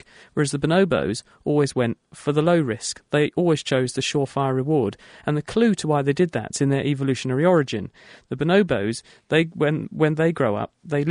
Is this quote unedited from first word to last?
yes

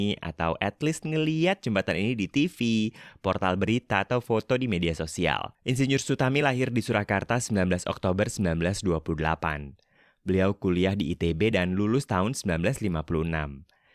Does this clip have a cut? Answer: no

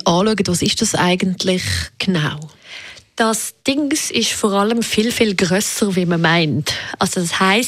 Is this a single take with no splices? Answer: yes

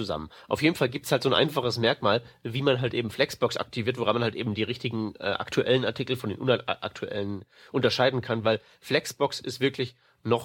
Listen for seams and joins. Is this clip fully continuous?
yes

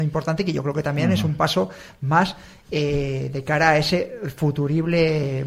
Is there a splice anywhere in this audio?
no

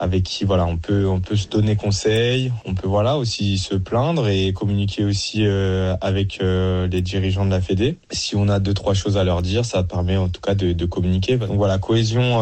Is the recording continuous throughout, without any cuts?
yes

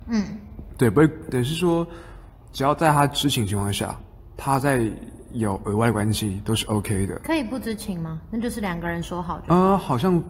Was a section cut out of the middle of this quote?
no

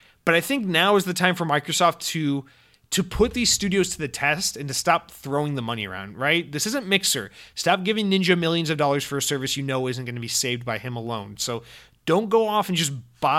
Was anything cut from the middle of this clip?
no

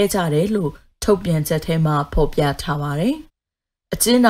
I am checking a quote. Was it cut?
yes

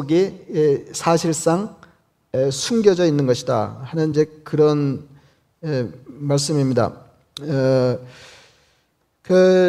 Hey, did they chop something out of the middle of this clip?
no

